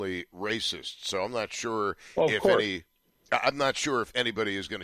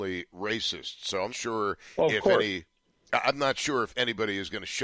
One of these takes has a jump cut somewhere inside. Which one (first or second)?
second